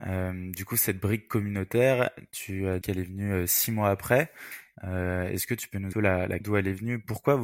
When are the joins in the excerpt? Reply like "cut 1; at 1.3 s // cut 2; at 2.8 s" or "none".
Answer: cut 1; at 2.8 s // cut 2; at 5.9 s // cut 3; at 6.4 s